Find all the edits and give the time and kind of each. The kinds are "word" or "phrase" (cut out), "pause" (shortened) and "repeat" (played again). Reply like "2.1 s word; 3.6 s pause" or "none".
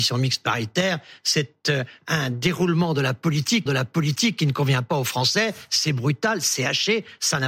3.7 s repeat